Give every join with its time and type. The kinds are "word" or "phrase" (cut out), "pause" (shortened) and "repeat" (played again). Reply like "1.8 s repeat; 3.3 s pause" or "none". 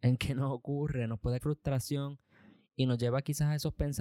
1.4 s word